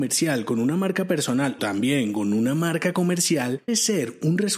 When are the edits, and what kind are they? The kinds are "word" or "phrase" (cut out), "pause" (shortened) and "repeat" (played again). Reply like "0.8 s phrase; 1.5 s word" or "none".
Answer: 1.6 s word; 3.7 s word